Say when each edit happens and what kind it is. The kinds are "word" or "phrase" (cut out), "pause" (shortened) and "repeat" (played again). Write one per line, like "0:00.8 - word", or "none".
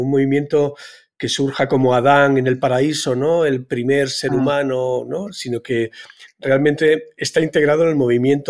none

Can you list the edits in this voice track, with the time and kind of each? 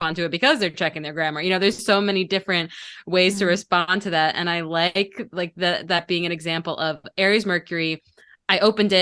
none

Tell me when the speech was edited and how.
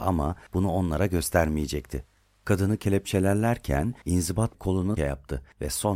0:04.5 - word
0:05.0 - word

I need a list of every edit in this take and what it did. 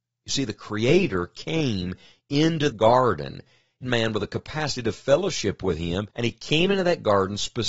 0:02.7 - word
0:03.8 - phrase
0:06.1 - pause

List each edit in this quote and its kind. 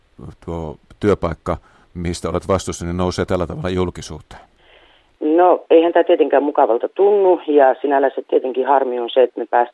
none

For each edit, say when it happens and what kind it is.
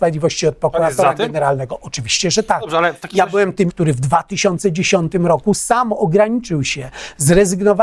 0:03.7 - word

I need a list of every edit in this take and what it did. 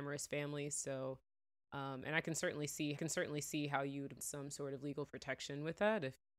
0:03.0 - repeat
0:04.2 - word

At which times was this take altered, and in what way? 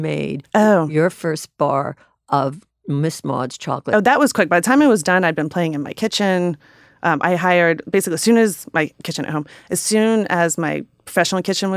none

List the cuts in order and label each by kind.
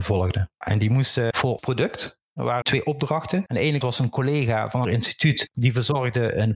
0:01.6 - word
0:02.6 - word
0:03.8 - word
0:04.8 - word

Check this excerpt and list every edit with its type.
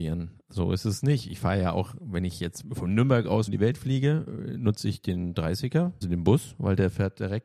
0:02.6 - word
0:03.5 - word
0:06.0 - word

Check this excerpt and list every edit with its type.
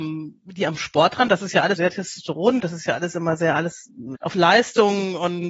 0:01.8 - word
0:02.6 - word
0:04.1 - word

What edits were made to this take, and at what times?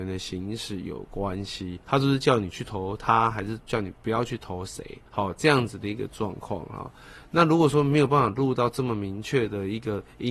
0:01.8 - pause
0:05.1 - pause

